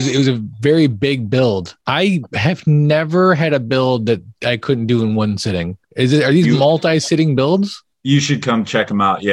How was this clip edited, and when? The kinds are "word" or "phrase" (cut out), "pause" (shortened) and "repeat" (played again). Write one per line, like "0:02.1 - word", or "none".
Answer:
0:01.8 - pause
0:05.8 - pause
0:07.9 - pause